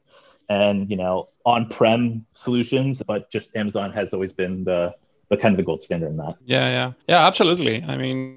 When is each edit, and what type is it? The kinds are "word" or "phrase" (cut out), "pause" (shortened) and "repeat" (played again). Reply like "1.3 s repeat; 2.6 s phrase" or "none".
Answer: 1.3 s pause; 5.0 s pause; 6.4 s pause; 7.0 s pause